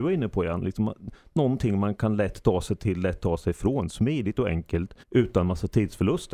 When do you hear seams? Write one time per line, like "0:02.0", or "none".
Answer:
0:05.0

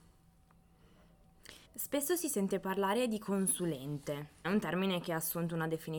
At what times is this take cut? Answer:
0:01.6
0:04.4

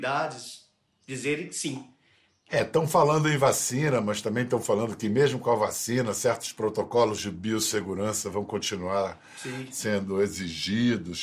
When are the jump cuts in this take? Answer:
none

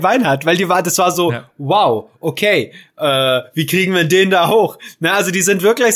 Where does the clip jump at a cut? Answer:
none

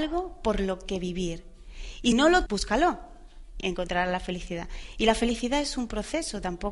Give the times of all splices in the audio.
0:02.1
0:02.5
0:03.6

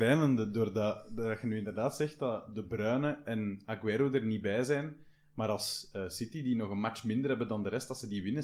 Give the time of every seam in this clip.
none

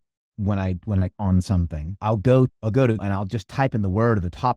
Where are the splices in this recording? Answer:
0:01.1
0:02.5
0:03.0

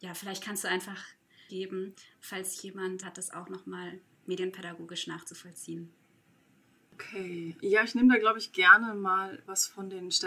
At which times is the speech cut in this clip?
0:01.5
0:03.0
0:07.6

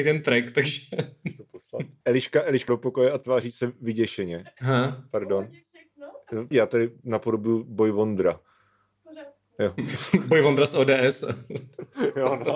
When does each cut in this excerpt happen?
0:02.0
0:02.7
0:06.5

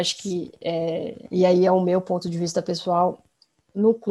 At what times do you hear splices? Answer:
none

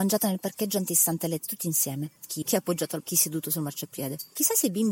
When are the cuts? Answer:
0:01.4
0:02.4
0:03.0

